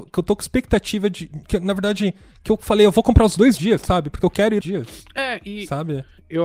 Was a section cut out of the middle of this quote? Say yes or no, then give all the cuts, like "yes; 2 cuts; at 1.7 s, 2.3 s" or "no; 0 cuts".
yes; 1 cut; at 4.6 s